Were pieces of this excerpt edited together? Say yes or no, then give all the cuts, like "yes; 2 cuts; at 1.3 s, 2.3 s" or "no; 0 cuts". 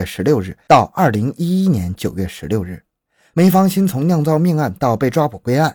no; 0 cuts